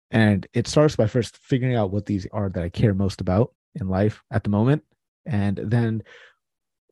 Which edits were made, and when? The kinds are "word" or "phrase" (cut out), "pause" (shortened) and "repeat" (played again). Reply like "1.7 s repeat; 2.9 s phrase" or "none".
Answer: 2.3 s word; 3.5 s pause